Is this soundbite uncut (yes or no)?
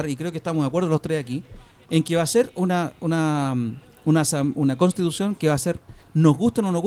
yes